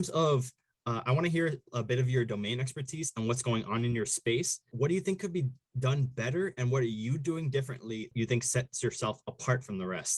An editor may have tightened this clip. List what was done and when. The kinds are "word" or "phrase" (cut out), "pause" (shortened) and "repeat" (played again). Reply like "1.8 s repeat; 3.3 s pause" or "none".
none